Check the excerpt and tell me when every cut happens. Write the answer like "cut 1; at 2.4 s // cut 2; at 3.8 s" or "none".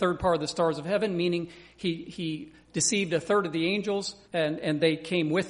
cut 1; at 4.2 s